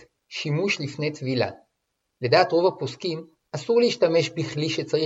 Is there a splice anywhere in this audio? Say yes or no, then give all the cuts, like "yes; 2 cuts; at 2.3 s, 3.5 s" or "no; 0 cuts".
no; 0 cuts